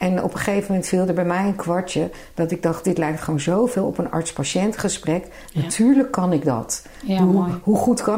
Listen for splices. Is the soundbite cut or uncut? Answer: uncut